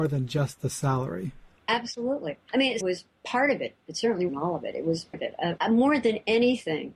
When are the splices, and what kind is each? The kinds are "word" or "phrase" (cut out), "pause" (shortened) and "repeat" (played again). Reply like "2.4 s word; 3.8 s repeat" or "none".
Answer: 2.8 s word; 4.3 s word; 5.1 s word; 5.6 s word